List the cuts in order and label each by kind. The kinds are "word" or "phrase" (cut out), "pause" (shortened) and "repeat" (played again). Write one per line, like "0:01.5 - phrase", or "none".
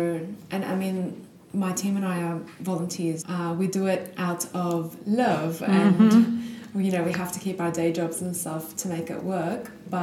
0:03.2 - word